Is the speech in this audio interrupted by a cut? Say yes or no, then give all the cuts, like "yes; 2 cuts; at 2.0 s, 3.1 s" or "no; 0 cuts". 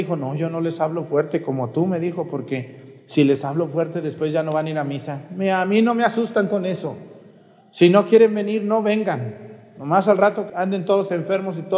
yes; 1 cut; at 10.5 s